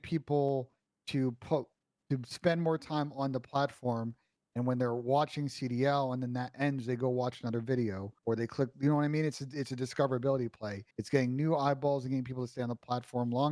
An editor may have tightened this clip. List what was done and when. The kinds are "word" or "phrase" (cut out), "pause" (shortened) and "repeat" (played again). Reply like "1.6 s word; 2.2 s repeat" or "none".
8.2 s pause; 10.9 s pause